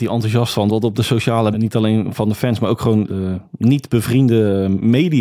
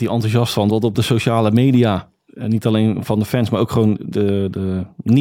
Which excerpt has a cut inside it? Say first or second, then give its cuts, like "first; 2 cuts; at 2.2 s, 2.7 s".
first; 2 cuts; at 1.5 s, 3.1 s